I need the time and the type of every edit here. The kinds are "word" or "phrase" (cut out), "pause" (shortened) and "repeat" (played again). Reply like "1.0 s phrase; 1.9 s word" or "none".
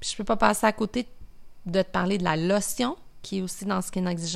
none

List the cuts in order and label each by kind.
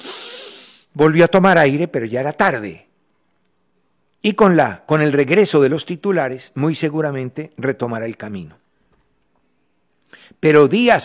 none

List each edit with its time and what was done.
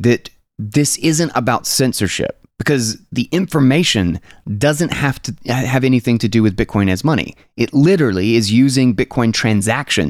2.5 s pause

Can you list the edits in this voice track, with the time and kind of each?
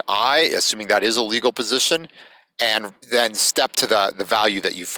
3.0 s pause

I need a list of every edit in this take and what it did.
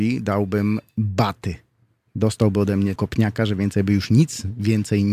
3.0 s word

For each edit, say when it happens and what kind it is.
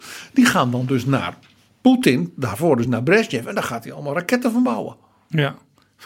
none

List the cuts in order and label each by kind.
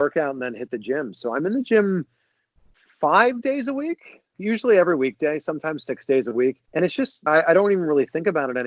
4.3 s word; 6.7 s pause; 7.3 s phrase

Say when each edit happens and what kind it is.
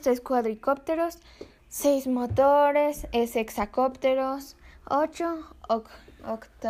1.6 s pause

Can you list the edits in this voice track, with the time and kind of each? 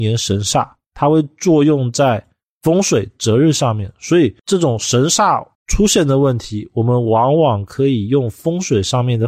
4.4 s pause; 5.5 s pause

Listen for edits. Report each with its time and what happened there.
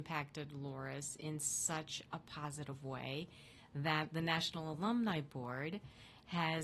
none

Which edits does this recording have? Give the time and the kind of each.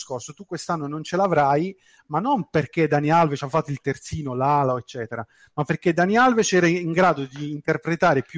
none

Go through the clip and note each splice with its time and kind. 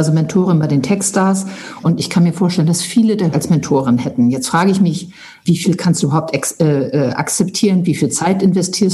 1.8 s phrase; 3.3 s phrase; 5.4 s word

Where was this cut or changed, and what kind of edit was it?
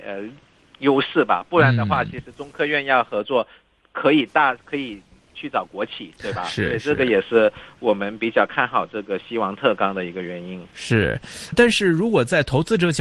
11.5 s word

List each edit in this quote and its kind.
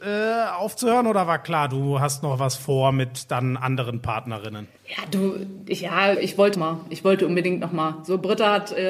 4.8 s pause; 6.1 s word; 6.5 s word

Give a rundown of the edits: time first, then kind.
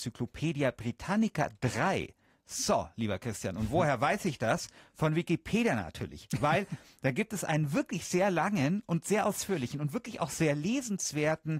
none

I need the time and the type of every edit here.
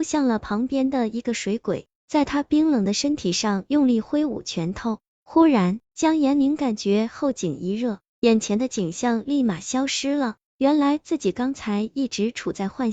5.8 s pause

